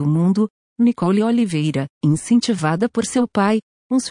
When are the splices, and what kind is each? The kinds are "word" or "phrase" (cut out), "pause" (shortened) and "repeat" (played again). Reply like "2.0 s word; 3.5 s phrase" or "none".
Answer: 1.9 s pause

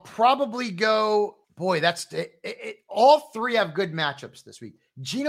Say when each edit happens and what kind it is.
1.4 s pause

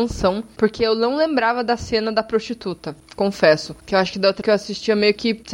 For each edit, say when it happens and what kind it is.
4.4 s word

